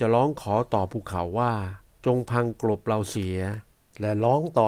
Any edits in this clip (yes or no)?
yes